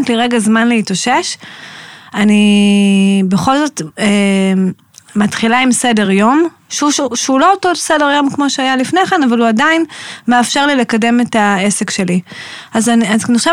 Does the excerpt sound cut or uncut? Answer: uncut